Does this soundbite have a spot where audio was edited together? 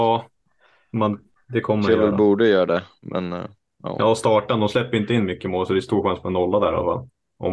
no; 0 cuts

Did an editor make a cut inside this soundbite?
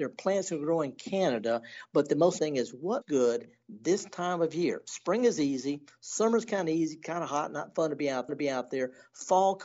yes; 3 cuts; at 2.4 s, 3.0 s, 8.3 s

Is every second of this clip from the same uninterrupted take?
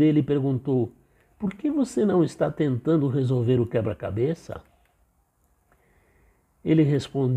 yes; 0 cuts

